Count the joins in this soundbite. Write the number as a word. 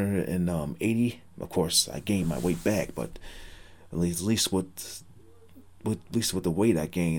zero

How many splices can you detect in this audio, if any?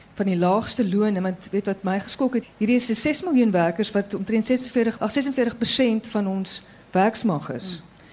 two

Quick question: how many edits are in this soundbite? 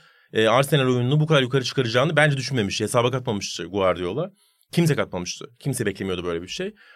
zero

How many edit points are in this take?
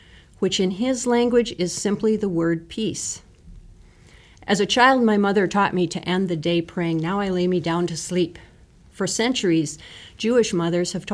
zero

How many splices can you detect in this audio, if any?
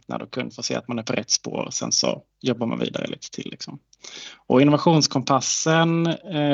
zero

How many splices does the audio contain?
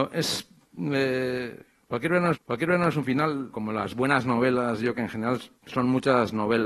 four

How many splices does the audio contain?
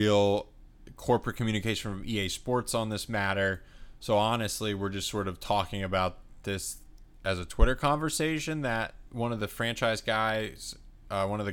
zero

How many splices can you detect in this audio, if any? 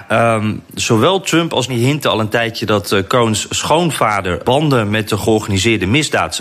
two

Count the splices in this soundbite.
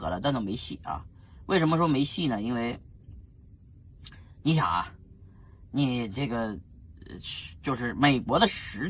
zero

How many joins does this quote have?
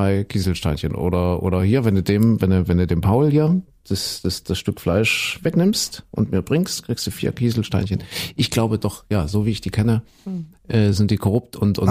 zero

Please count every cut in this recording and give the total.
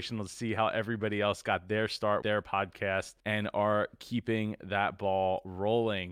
two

